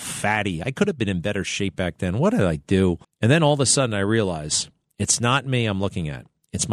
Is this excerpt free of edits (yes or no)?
no